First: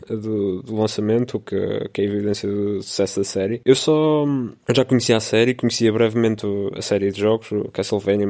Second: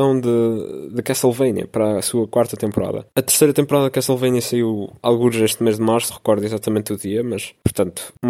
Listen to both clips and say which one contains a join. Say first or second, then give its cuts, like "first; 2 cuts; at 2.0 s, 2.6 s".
second; 1 cut; at 6.1 s